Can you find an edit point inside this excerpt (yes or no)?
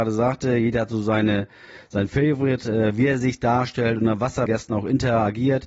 yes